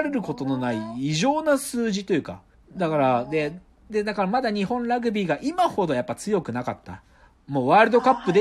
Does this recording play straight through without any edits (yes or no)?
no